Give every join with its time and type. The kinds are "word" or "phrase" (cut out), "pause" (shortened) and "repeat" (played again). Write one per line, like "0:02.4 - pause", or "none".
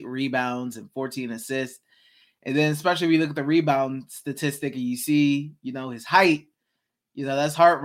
none